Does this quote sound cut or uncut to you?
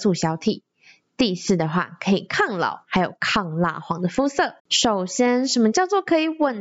cut